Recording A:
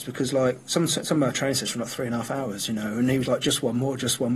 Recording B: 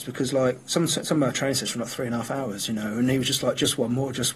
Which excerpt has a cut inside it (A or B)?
A